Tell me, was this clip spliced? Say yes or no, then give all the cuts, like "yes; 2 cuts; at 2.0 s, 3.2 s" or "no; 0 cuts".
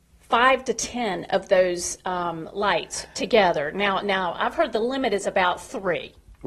no; 0 cuts